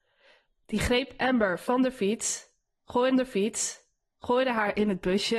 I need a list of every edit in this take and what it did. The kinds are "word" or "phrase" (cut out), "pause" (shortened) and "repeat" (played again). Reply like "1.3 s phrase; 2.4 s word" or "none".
3.1 s repeat